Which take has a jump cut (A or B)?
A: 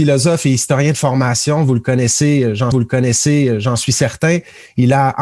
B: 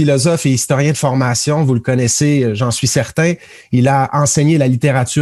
A